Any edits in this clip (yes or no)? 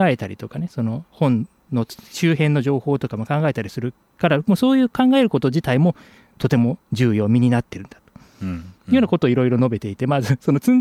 yes